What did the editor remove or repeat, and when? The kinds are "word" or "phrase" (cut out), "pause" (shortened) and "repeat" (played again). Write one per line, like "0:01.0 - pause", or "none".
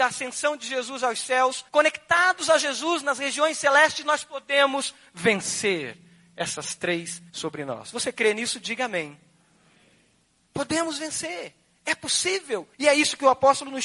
0:01.7 - pause
0:07.3 - word
0:12.7 - pause